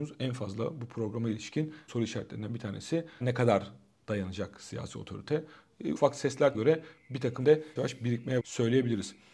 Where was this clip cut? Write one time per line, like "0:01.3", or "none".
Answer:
0:01.9
0:03.2
0:06.0
0:06.5
0:07.4
0:07.8
0:08.4

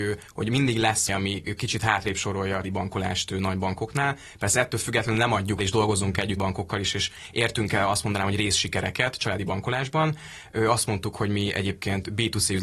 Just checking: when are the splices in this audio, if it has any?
0:01.1
0:02.6
0:05.6
0:06.4

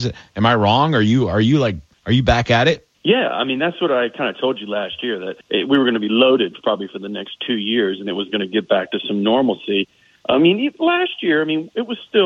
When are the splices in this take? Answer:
0:01.9
0:02.9
0:05.4

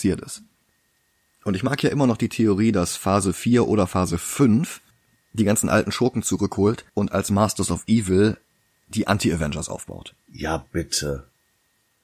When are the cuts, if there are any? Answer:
0:04.9
0:06.9

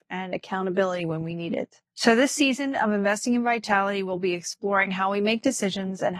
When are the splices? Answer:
0:01.8

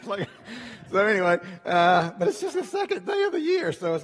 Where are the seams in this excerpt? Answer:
0:02.5

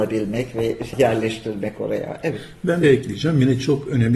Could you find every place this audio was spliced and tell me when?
0:00.9
0:02.8

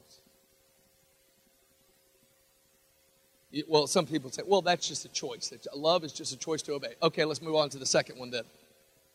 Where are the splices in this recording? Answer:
none

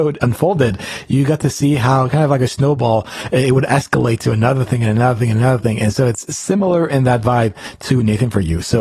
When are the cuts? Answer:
none

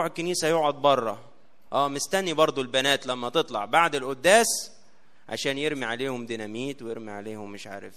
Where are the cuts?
none

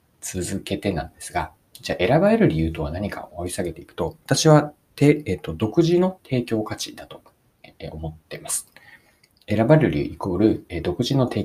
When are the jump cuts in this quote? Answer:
none

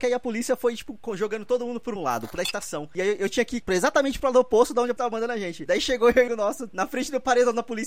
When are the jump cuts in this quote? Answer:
0:02.0
0:02.4
0:05.0
0:06.3

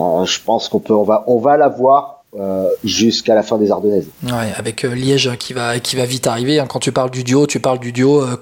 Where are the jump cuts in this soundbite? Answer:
none

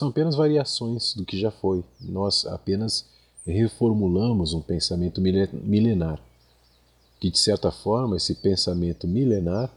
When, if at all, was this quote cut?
none

